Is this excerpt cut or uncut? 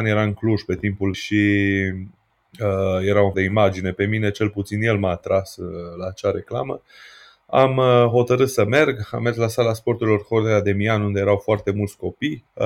cut